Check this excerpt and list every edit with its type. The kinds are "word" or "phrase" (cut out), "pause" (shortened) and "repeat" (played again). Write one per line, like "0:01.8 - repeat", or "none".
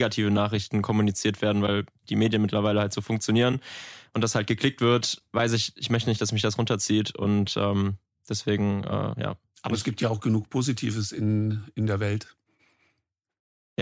none